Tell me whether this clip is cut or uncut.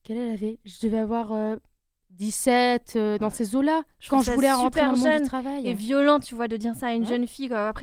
uncut